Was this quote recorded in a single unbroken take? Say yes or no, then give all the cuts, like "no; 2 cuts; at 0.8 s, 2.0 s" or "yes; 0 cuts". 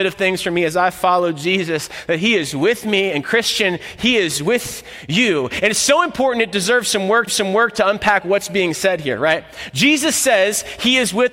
no; 1 cut; at 7.3 s